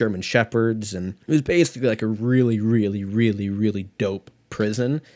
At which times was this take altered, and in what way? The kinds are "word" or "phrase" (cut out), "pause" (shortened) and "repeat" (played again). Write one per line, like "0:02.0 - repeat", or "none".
0:01.2 - pause